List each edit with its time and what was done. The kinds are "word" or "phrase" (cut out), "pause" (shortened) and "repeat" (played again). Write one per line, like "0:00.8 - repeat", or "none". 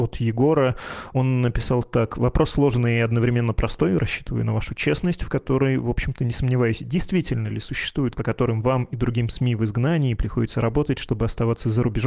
0:08.2 - phrase